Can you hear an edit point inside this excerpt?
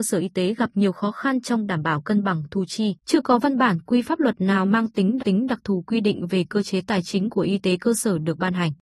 yes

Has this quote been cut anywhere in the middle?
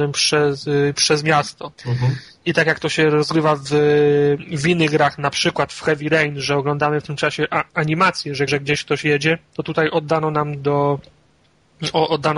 yes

